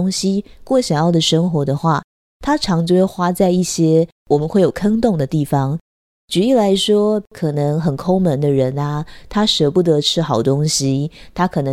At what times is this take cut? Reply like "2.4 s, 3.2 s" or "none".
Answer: none